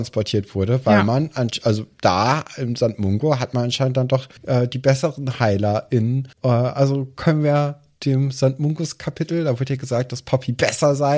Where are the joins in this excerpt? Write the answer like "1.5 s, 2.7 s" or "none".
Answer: 4.4 s, 6.3 s